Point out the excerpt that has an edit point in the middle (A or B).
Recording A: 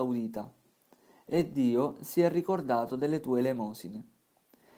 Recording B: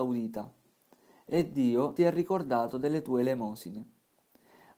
B